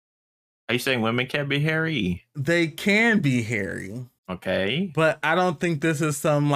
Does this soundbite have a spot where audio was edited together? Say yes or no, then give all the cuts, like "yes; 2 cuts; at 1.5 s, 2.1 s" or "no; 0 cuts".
yes; 1 cut; at 4.2 s